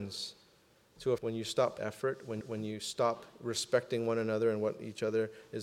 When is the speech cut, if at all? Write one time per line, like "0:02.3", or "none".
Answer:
0:01.2
0:01.8
0:02.4